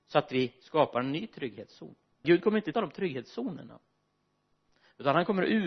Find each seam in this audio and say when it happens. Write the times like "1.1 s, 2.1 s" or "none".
2.2 s, 2.7 s